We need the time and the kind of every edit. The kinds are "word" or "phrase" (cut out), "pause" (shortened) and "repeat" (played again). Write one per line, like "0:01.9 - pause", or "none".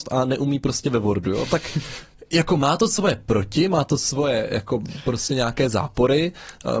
none